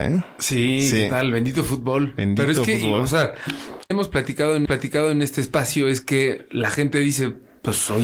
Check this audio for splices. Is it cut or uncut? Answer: cut